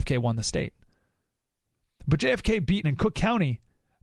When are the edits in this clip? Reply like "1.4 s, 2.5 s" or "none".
2.8 s